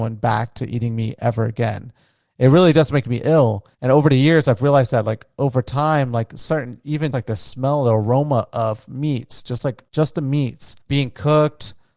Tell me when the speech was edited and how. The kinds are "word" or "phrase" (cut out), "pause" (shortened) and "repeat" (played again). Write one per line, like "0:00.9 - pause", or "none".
0:03.7 - pause
0:07.1 - word
0:09.9 - pause
0:10.8 - pause